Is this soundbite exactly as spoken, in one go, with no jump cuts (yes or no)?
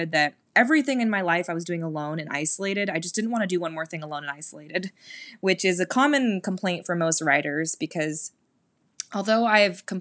yes